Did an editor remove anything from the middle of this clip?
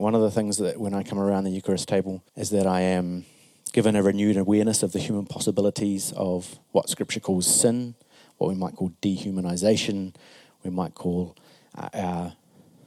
yes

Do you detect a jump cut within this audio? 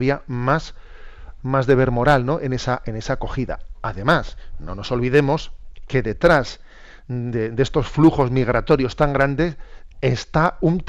no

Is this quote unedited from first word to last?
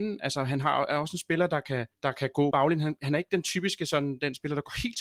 no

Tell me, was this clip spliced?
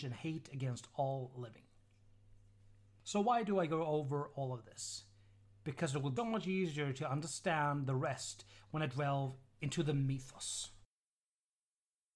yes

